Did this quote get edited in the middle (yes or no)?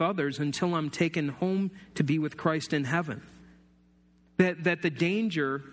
no